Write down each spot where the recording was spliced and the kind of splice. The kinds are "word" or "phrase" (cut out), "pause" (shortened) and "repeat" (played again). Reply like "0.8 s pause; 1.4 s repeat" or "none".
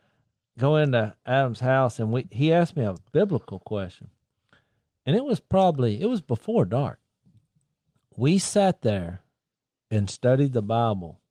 none